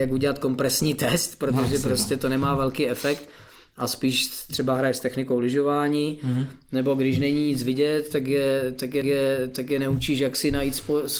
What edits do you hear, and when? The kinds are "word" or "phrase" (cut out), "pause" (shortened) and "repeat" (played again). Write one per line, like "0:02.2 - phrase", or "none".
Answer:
0:04.5 - word
0:09.0 - repeat